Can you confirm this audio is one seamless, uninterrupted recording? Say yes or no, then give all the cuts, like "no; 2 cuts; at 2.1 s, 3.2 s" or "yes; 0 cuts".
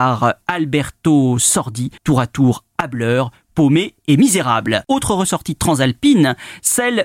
no; 1 cut; at 2.0 s